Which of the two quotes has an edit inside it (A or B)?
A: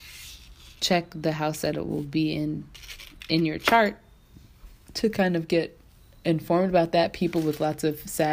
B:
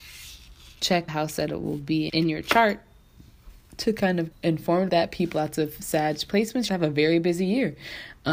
B